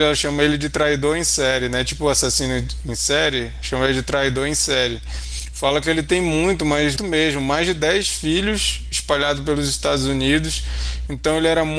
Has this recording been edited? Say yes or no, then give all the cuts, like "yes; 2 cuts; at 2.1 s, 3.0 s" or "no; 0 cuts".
yes; 1 cut; at 7.0 s